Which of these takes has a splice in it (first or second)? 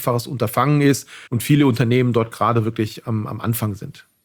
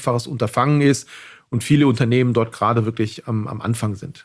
first